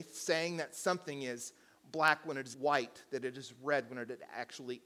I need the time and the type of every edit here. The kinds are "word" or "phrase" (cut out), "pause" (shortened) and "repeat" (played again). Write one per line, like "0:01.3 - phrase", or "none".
0:02.5 - word